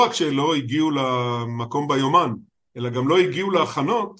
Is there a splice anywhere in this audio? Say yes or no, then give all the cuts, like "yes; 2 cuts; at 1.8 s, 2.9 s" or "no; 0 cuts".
no; 0 cuts